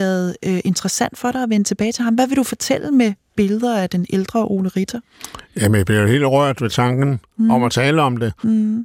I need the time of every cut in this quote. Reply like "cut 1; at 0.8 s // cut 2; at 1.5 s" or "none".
none